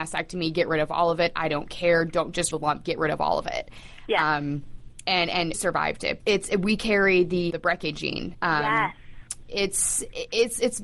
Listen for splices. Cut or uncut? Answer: cut